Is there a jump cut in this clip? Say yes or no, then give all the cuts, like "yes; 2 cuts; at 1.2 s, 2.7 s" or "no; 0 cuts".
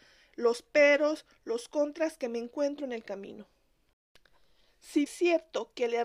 yes; 1 cut; at 5.1 s